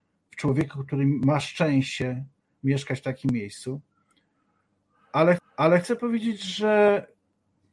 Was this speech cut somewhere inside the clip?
yes; 1 cut; at 5.4 s

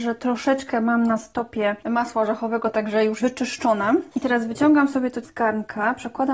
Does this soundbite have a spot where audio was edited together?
yes; 2 cuts; at 3.2 s, 5.2 s

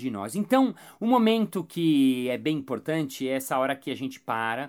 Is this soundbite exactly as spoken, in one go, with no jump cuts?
yes; 0 cuts

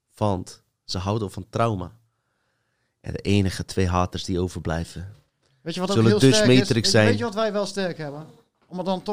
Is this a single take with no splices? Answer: yes; 0 cuts

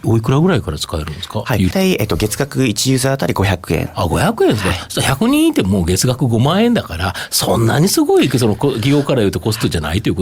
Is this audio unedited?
no; 1 cut; at 1.7 s

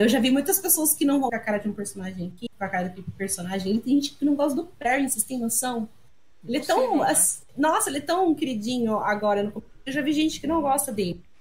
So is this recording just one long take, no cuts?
no; 2 cuts; at 1.3 s, 2.5 s

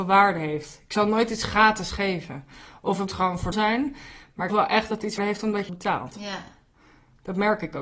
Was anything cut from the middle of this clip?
yes; 5 cuts; at 3.1 s, 3.5 s, 4.5 s, 5.2 s, 5.7 s

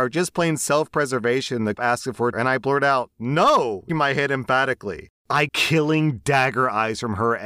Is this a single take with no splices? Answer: no; 4 cuts; at 1.7 s, 2.3 s, 3.9 s, 5.5 s

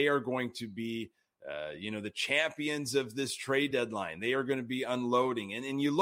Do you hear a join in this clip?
no; 0 cuts

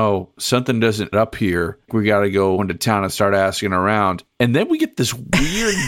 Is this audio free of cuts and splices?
no; 3 cuts; at 1.1 s, 1.9 s, 4.3 s

